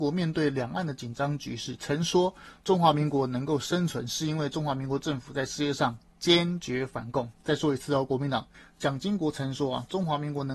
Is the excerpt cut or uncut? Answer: cut